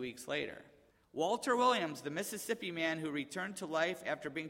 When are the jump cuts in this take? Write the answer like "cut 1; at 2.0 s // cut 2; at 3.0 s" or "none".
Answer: none